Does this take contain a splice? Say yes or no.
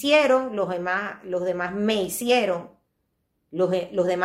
no